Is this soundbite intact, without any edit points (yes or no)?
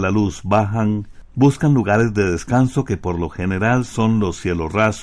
yes